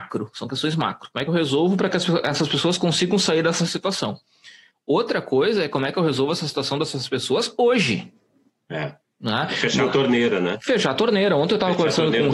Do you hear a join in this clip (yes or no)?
no